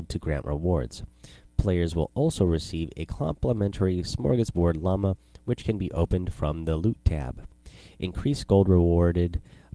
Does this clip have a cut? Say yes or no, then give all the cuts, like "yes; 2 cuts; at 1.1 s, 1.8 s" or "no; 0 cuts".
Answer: no; 0 cuts